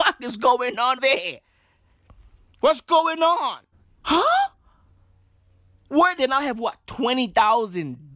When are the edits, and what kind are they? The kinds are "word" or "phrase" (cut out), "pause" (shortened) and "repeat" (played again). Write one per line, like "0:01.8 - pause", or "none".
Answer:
0:01.0 - word
0:03.7 - pause
0:06.2 - word